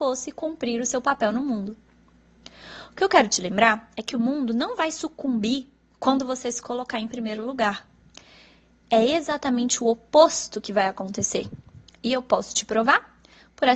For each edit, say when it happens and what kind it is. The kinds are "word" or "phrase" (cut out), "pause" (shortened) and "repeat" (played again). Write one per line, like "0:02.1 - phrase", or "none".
none